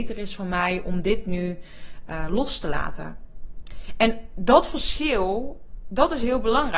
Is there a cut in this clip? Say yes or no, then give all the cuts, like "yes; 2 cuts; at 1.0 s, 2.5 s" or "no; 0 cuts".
no; 0 cuts